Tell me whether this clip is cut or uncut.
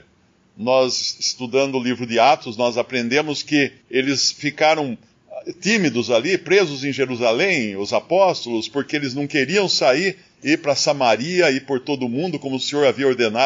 cut